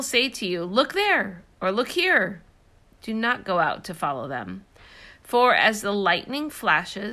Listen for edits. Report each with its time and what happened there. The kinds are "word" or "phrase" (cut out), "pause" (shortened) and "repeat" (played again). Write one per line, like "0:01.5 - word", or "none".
none